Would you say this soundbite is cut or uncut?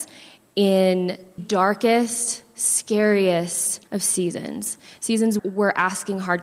cut